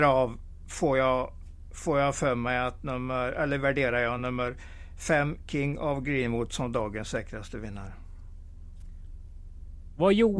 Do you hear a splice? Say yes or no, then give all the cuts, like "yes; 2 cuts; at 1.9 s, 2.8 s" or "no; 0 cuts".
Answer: no; 0 cuts